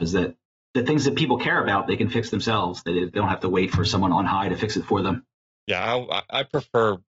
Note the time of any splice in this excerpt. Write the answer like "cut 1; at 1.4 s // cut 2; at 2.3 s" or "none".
none